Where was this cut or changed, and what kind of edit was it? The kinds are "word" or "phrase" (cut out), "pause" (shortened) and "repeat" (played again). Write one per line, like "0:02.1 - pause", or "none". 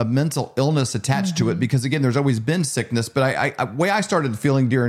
none